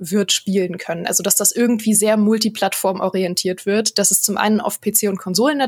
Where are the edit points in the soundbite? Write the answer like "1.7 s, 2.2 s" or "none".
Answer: none